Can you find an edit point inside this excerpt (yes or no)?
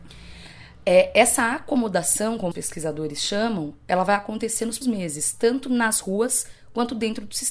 yes